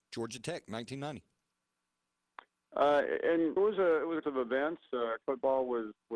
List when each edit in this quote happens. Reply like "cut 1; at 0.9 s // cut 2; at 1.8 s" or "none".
cut 1; at 3.6 s // cut 2; at 4.2 s // cut 3; at 5.2 s